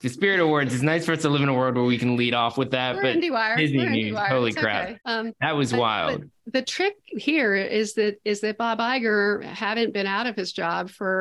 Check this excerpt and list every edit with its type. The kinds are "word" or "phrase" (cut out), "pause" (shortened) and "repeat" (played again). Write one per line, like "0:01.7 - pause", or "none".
0:05.0 - pause